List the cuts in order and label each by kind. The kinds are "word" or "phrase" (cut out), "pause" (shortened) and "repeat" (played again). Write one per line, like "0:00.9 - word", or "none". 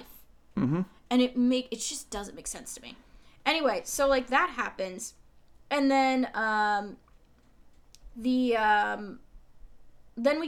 none